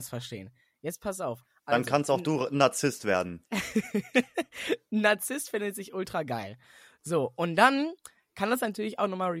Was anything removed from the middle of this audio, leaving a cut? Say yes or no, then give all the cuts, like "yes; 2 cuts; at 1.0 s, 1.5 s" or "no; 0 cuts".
no; 0 cuts